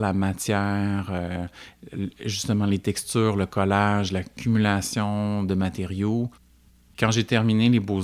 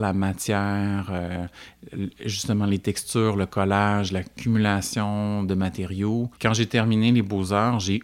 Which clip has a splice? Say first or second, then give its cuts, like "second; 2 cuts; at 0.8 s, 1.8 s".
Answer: second; 1 cut; at 6.4 s